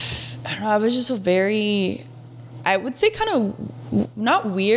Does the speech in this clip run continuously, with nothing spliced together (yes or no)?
no